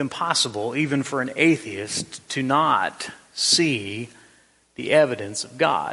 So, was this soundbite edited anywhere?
no; 0 cuts

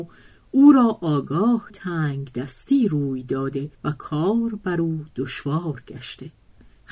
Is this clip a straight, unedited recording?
no; 2 cuts; at 1.7 s, 3.7 s

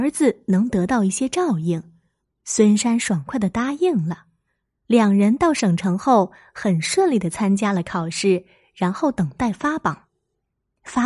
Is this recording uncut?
yes; 0 cuts

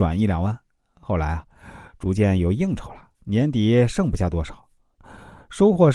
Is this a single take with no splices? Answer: no; 1 cut; at 3.1 s

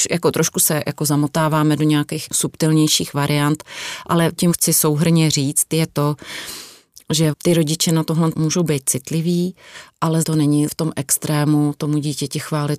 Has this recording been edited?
yes; 4 cuts; at 4.4 s, 8.3 s, 10.2 s, 10.7 s

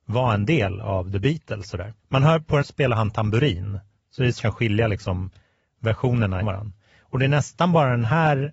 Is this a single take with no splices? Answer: no; 4 cuts; at 2.0 s, 2.6 s, 4.4 s, 6.4 s

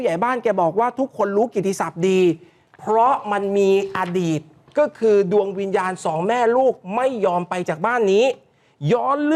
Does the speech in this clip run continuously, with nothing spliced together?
yes; 0 cuts

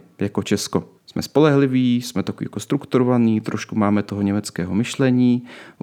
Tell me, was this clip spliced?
yes; 1 cut; at 1.0 s

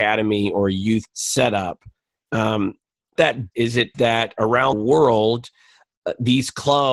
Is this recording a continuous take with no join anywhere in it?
no; 5 cuts; at 1.1 s, 3.2 s, 3.5 s, 3.9 s, 4.7 s

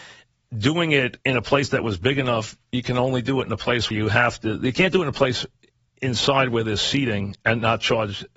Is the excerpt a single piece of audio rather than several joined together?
no; 2 cuts; at 1.2 s, 3.9 s

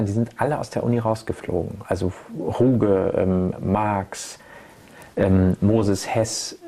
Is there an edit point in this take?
no; 0 cuts

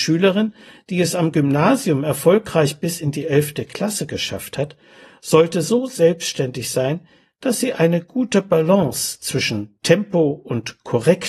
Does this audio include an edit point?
no; 0 cuts

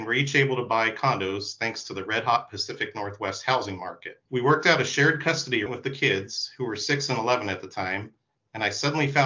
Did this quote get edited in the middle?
yes; 2 cuts; at 4.3 s, 5.7 s

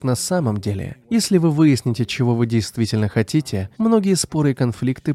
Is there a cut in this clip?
yes; 2 cuts; at 1.0 s, 3.7 s

